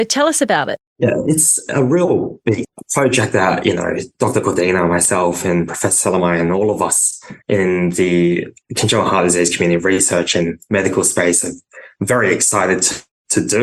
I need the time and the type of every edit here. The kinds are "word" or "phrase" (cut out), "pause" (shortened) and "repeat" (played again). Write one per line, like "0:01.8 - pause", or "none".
0:07.4 - pause